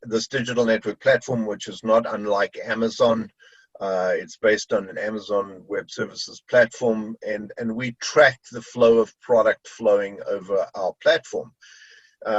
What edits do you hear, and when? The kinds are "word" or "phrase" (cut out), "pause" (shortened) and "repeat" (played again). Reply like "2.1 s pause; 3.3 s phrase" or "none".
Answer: none